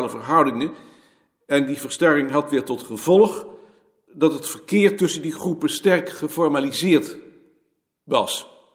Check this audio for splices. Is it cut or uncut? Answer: uncut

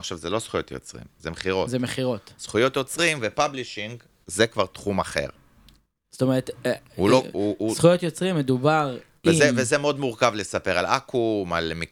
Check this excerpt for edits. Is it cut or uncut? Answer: uncut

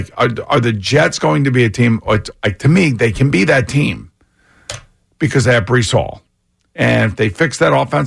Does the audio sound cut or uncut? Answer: uncut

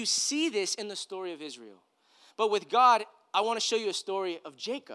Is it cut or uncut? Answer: uncut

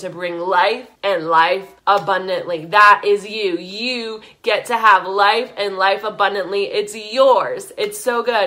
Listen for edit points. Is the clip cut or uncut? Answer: cut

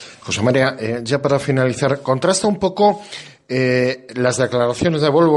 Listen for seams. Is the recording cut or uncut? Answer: uncut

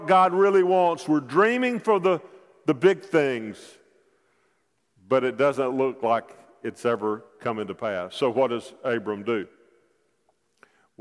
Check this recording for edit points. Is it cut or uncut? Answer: uncut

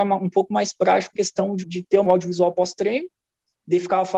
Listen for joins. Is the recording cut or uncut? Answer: cut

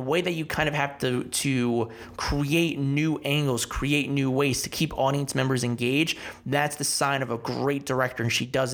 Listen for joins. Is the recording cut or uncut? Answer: uncut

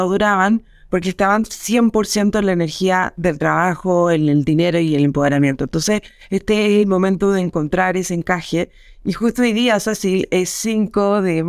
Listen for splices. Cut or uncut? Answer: uncut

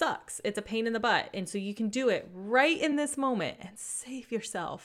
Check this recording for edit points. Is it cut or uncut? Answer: uncut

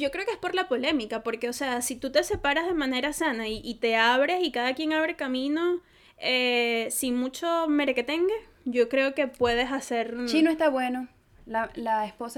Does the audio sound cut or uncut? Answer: uncut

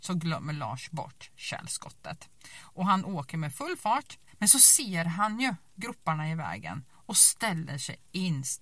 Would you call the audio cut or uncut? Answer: cut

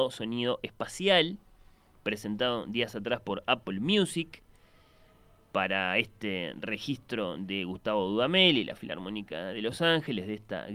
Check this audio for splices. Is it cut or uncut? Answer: uncut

